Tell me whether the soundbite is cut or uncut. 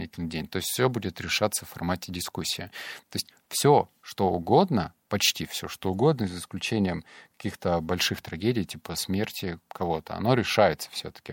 uncut